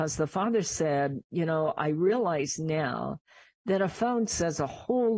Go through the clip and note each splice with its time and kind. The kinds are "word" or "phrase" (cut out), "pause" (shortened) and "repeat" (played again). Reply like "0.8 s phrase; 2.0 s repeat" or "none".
none